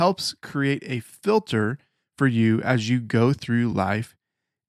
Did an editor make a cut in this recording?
no; 0 cuts

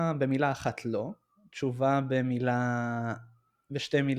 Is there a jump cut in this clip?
no; 0 cuts

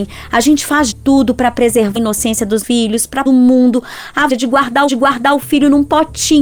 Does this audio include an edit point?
yes; 6 cuts; at 0.9 s, 2.0 s, 2.6 s, 3.3 s, 4.3 s, 4.9 s

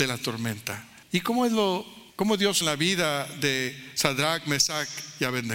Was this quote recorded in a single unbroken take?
no; 3 cuts; at 1.0 s, 2.1 s, 2.6 s

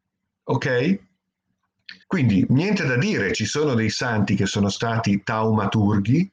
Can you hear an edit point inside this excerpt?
yes; 1 cut; at 2.0 s

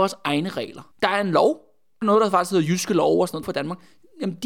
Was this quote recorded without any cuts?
no; 3 cuts; at 0.9 s, 2.0 s, 3.4 s

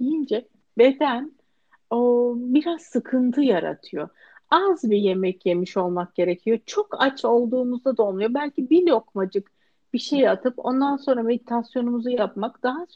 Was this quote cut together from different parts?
no; 0 cuts

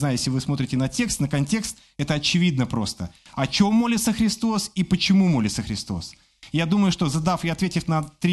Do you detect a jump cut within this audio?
no; 0 cuts

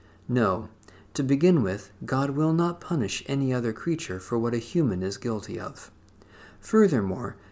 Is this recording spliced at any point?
no; 0 cuts

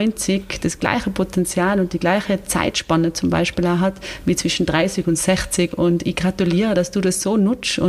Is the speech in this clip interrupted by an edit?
no; 0 cuts

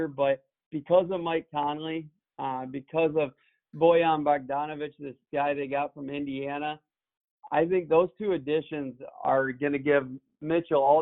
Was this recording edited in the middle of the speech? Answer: no; 0 cuts

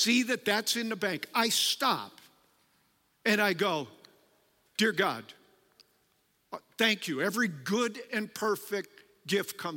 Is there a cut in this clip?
no; 0 cuts

